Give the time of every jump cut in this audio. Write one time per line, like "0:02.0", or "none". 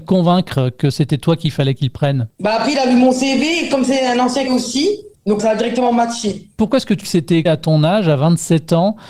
0:04.5
0:05.4
0:07.0
0:07.5